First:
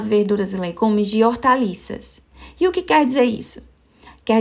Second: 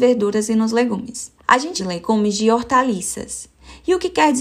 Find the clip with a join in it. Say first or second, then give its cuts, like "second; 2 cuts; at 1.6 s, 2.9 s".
second; 2 cuts; at 1.4 s, 1.8 s